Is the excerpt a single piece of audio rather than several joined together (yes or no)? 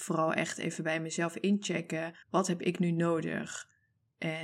no